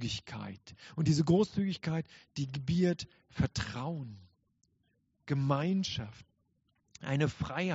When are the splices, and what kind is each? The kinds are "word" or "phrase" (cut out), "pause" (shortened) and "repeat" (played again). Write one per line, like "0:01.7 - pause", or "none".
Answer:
none